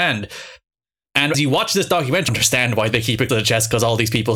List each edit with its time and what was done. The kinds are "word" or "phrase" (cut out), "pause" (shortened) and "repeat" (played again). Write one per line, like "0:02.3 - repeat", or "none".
0:01.3 - word
0:02.3 - word
0:03.3 - word